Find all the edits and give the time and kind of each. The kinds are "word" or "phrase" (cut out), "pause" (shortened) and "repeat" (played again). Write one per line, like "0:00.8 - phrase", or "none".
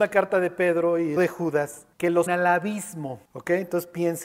0:01.2 - phrase
0:01.9 - pause
0:02.3 - word
0:03.2 - pause